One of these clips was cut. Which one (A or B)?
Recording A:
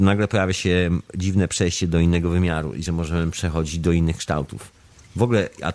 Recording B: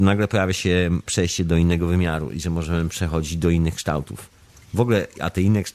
B